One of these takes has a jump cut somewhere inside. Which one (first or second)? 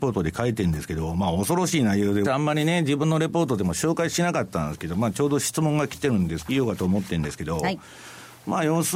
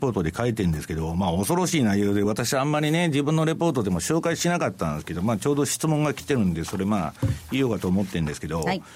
first